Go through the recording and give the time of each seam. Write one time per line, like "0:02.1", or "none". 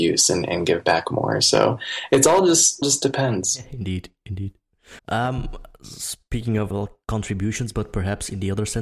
0:02.8
0:05.0
0:06.7